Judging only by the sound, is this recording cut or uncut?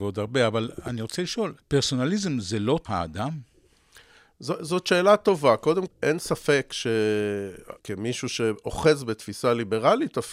cut